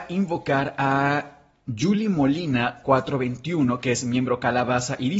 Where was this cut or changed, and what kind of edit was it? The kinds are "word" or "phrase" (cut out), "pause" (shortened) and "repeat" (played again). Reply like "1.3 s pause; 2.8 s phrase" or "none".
none